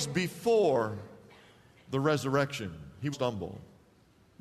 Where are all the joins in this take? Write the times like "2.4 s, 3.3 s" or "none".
3.1 s